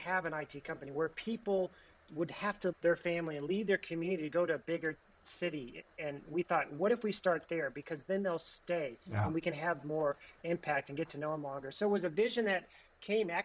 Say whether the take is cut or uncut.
cut